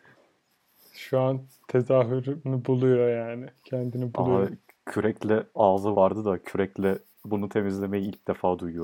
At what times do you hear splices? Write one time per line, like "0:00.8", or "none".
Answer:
0:05.9